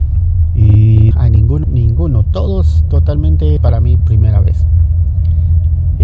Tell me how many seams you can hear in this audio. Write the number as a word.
four